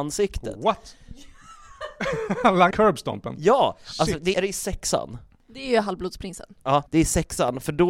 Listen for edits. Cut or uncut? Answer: cut